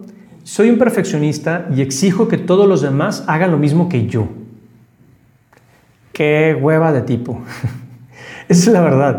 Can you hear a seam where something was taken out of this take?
no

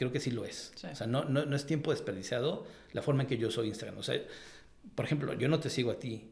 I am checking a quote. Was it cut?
no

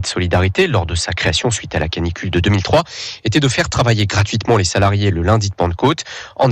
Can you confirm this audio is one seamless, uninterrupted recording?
yes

